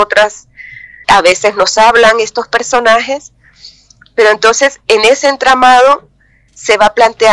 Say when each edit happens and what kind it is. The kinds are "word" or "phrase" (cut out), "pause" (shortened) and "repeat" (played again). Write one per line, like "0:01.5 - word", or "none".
0:01.0 - word